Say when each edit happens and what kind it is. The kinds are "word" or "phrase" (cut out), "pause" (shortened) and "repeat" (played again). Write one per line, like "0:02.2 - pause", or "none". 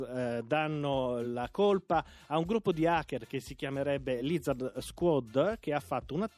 none